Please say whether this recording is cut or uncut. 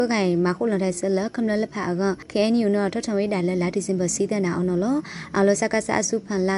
uncut